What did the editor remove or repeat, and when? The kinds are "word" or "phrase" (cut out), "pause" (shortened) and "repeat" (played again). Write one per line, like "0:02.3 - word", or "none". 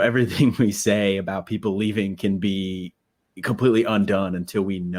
none